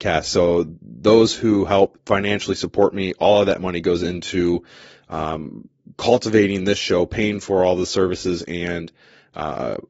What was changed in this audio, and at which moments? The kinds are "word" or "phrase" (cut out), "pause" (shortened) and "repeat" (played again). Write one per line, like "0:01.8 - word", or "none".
none